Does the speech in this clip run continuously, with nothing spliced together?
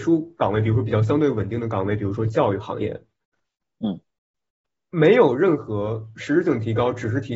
yes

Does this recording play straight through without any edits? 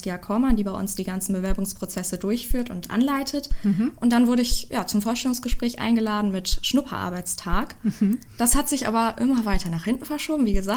yes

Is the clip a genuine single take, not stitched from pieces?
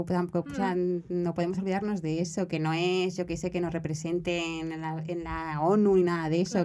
yes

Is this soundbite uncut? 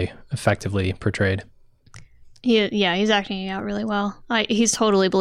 yes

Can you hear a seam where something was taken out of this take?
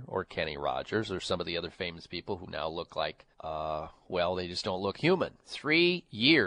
yes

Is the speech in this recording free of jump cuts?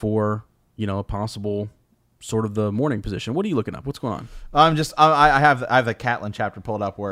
yes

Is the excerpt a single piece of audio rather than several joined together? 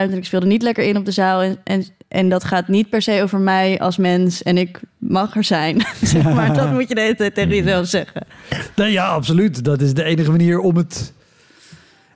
yes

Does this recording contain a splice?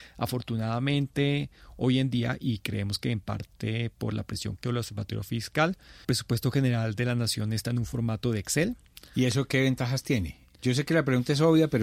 yes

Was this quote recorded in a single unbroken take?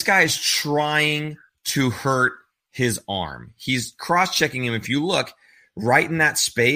yes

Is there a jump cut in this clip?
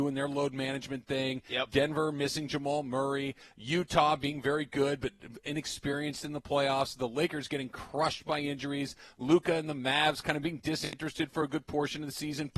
no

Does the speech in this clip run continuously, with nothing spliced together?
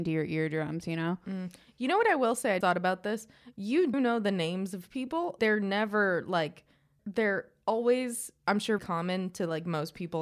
no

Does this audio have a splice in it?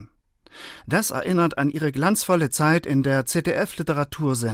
no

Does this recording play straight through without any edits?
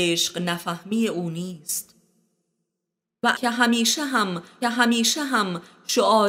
no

